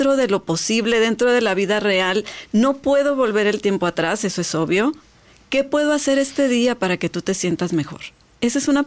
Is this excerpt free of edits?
yes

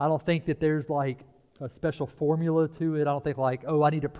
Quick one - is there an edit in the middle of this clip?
no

